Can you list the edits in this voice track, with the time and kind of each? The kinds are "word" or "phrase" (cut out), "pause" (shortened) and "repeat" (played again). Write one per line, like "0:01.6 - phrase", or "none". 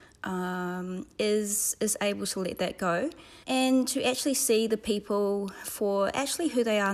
0:03.4 - pause